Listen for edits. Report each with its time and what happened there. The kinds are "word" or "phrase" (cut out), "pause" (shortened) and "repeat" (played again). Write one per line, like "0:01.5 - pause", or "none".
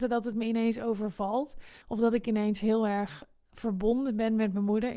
0:01.8 - pause